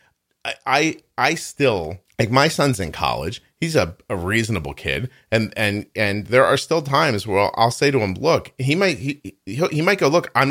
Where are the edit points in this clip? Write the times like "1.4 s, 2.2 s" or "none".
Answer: 2.1 s